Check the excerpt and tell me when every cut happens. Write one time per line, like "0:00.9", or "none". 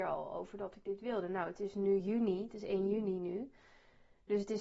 none

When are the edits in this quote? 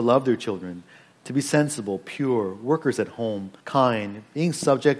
0:03.6

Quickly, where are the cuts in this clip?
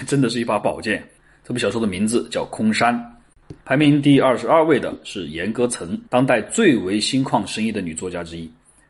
0:01.2
0:03.6
0:06.1

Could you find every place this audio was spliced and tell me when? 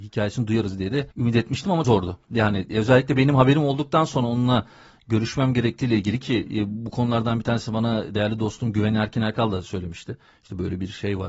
0:01.1
0:01.8

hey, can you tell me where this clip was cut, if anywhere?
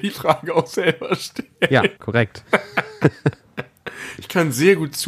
0:02.0

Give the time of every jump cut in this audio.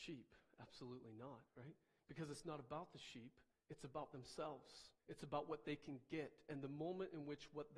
0:01.5
0:03.5
0:05.0

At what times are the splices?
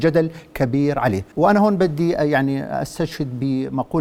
0:01.3

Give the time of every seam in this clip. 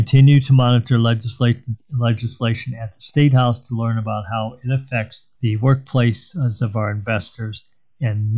0:05.3

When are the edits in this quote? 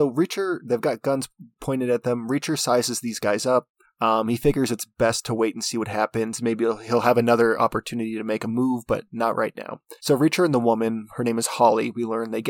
0:03.8
0:10.0

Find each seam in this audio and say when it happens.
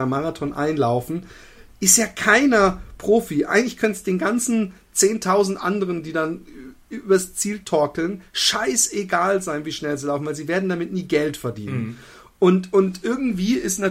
none

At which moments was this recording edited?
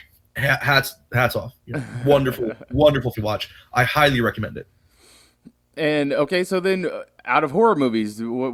0:03.1
0:07.2

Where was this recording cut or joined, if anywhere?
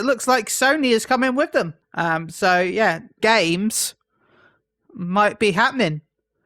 0:01.8
0:03.2

